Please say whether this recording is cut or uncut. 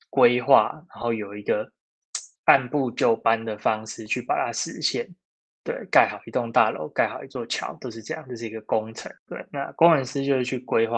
cut